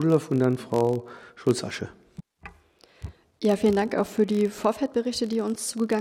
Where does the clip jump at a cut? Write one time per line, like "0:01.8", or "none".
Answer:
none